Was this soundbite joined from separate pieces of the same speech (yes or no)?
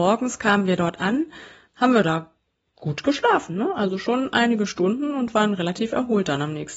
no